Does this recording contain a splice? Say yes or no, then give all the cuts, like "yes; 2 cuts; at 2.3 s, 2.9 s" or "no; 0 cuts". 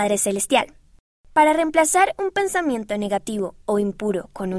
no; 0 cuts